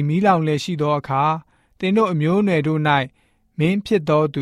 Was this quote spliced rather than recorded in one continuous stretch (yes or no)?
no